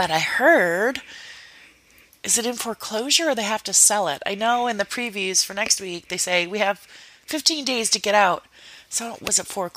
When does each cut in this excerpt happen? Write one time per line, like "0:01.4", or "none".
none